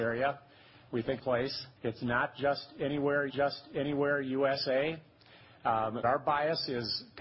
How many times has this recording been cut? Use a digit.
4